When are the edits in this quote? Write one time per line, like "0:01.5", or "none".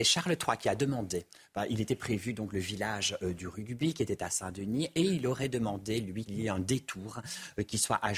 0:06.3